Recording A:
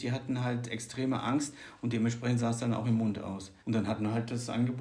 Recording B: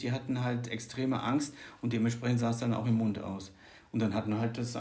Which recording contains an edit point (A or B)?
A